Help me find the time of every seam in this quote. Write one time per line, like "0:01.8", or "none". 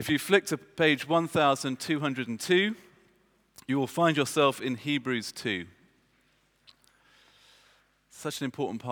none